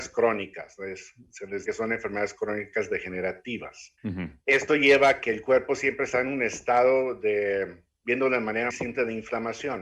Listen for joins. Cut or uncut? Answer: cut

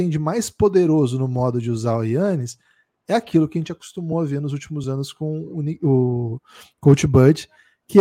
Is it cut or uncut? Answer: uncut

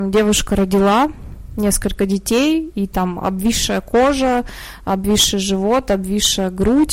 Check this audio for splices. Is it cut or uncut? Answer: uncut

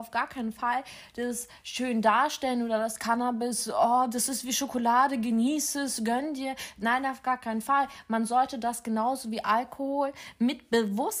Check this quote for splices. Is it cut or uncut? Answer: uncut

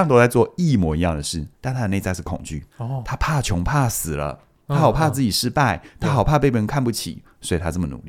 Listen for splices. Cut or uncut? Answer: cut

